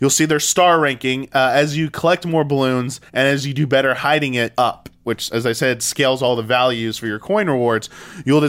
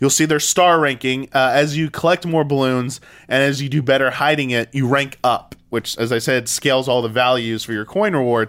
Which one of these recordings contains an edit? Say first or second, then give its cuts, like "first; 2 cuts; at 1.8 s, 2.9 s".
first; 2 cuts; at 3.1 s, 4.5 s